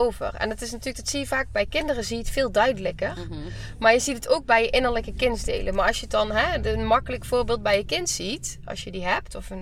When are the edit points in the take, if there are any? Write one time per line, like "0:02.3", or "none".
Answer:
none